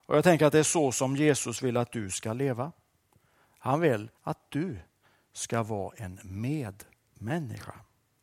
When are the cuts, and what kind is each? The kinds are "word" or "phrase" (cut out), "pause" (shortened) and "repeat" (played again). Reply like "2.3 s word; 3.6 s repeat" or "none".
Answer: 4.2 s pause